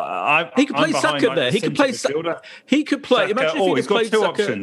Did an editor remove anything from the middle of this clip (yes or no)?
no